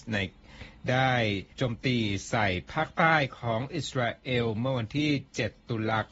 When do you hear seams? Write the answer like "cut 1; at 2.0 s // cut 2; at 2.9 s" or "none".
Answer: cut 1; at 1.5 s